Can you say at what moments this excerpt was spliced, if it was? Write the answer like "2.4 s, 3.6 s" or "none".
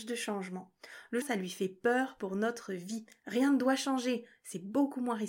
1.2 s